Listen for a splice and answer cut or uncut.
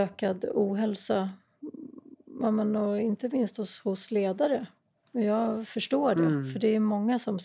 uncut